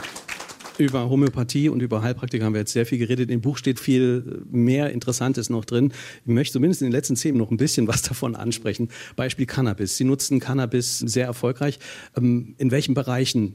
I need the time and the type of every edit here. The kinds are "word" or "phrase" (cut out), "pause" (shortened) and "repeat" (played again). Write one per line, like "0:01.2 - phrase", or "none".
0:03.8 - word
0:07.3 - word
0:11.0 - word
0:12.6 - word